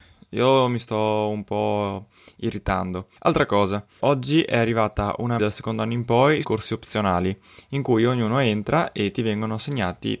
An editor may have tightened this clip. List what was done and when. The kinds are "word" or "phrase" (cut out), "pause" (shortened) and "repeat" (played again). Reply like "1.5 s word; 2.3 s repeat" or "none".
3.2 s pause; 4.0 s word; 5.4 s phrase; 6.4 s word